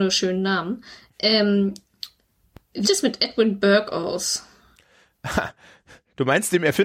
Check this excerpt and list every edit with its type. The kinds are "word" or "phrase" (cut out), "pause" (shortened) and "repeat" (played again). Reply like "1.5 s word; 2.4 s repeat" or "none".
2.8 s word